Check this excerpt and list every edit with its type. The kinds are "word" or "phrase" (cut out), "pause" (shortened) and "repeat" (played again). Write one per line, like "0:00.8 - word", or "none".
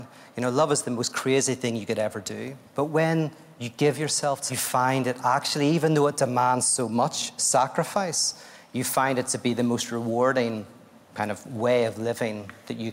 0:02.7 - pause
0:04.5 - phrase